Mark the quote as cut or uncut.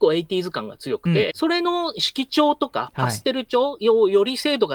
cut